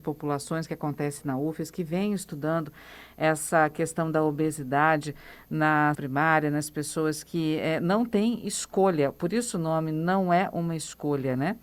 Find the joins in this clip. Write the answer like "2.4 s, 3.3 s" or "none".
5.9 s